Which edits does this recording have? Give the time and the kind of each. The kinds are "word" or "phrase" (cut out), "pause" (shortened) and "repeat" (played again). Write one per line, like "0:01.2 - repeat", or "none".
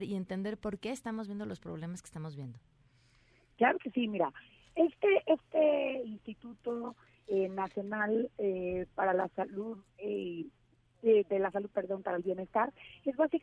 none